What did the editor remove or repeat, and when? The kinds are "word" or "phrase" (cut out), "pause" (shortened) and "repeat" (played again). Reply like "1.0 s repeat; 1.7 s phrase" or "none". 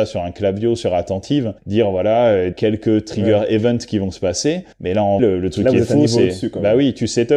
1.6 s pause; 2.5 s word; 4.7 s pause; 5.2 s word